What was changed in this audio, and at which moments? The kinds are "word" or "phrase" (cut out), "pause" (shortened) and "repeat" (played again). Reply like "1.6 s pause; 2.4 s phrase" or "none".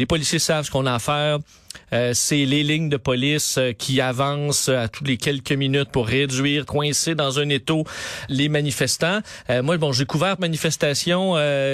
6.7 s word; 8.3 s word; 10.4 s word